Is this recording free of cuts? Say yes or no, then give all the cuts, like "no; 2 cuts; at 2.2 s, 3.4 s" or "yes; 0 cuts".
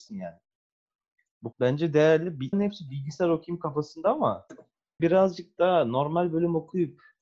no; 3 cuts; at 1.5 s, 2.5 s, 5.0 s